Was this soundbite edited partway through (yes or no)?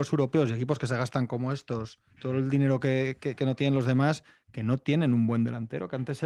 yes